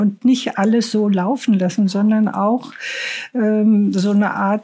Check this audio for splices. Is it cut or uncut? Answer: uncut